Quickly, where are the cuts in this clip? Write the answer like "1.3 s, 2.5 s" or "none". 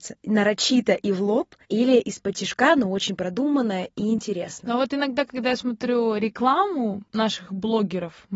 1.6 s